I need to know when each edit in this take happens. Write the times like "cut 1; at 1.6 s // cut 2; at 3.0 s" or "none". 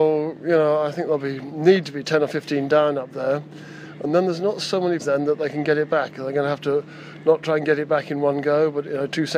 cut 1; at 5.0 s